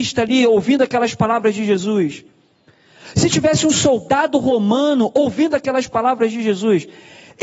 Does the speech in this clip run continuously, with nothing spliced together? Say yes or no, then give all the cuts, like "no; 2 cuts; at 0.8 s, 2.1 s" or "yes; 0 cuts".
yes; 0 cuts